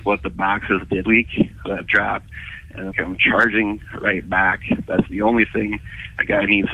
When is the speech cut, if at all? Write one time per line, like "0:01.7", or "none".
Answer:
0:01.0
0:01.9
0:02.9
0:05.1